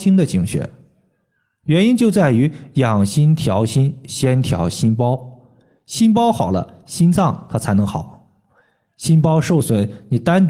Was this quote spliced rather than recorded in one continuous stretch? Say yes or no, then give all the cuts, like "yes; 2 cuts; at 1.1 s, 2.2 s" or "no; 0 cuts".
no; 0 cuts